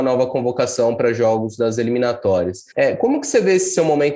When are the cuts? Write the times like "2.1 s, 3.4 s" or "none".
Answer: 2.7 s